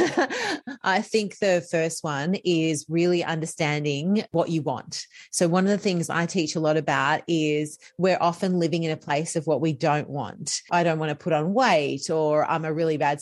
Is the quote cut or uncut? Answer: uncut